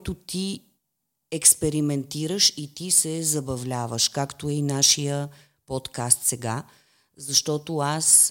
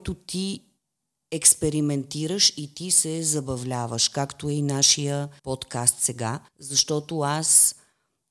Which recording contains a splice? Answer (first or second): second